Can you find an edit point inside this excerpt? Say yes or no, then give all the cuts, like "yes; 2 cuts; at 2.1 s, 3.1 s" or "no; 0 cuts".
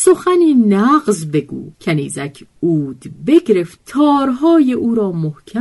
yes; 2 cuts; at 1.7 s, 3.8 s